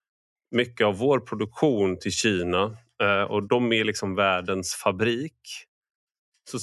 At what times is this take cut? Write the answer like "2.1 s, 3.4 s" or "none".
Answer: 3.5 s

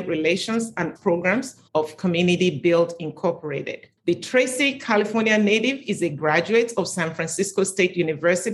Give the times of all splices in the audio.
1.0 s, 1.7 s, 4.0 s

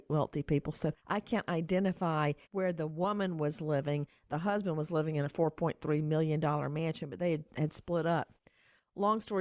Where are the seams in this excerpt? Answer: 1.0 s, 2.4 s

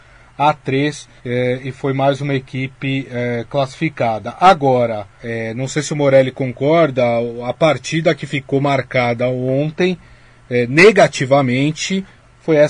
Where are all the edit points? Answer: 1.2 s, 5.1 s

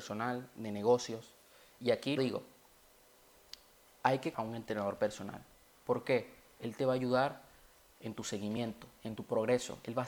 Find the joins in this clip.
2.2 s, 4.3 s

